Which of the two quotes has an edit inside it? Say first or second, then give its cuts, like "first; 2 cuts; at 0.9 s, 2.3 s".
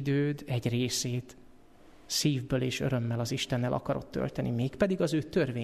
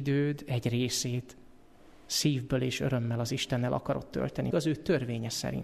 second; 1 cut; at 4.5 s